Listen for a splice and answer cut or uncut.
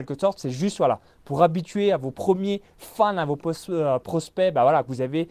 cut